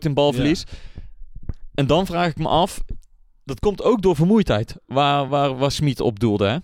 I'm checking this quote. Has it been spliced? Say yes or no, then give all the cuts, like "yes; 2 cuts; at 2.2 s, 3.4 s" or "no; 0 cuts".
no; 0 cuts